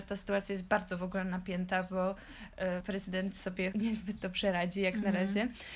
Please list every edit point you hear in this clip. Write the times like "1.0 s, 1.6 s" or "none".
2.8 s, 3.7 s